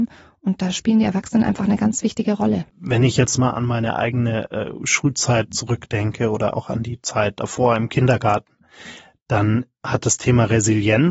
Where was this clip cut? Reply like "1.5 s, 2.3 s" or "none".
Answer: 2.7 s